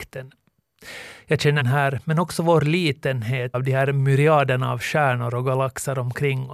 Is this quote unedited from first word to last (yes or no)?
no